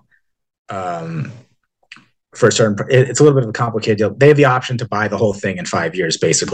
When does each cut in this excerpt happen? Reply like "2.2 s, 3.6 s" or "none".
none